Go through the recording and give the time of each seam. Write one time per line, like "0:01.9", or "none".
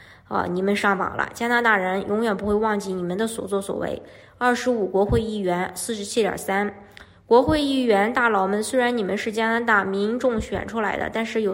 none